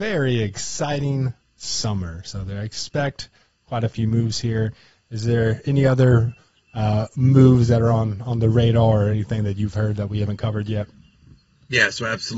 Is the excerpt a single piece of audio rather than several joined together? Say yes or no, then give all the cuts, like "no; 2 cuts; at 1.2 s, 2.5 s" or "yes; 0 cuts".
yes; 0 cuts